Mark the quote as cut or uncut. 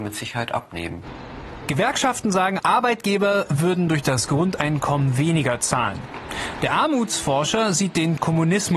cut